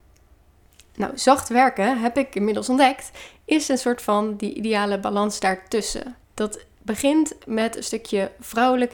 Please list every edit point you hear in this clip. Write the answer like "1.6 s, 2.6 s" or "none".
6.2 s